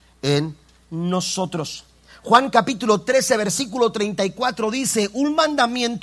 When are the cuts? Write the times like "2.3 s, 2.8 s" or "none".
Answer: none